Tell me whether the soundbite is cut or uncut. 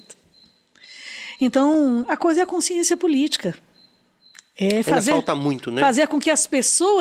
uncut